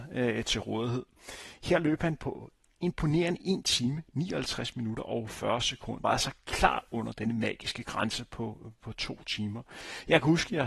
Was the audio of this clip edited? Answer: yes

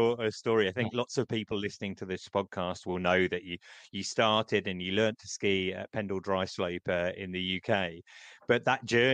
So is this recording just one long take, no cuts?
yes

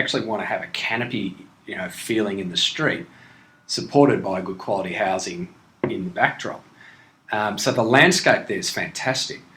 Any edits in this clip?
no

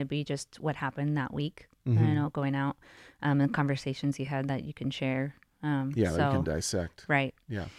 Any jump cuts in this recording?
no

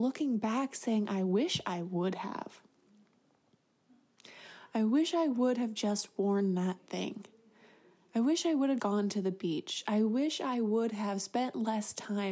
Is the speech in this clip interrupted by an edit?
yes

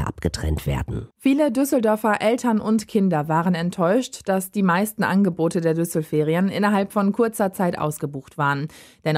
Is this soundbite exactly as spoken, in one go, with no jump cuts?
no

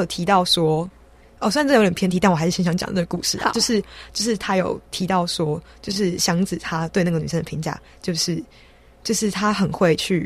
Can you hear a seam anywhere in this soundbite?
no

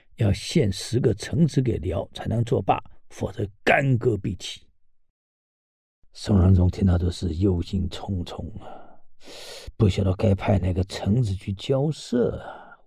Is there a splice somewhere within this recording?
no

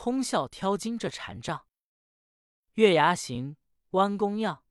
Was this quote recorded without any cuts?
yes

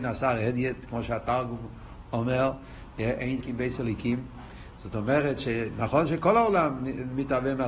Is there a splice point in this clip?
yes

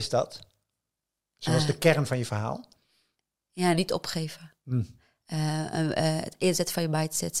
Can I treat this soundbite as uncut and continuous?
yes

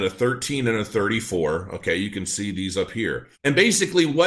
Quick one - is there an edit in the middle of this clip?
yes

